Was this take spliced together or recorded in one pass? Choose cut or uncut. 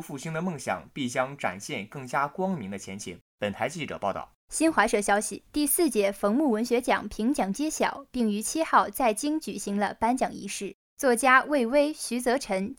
cut